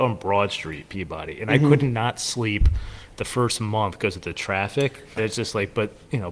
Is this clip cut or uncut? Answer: cut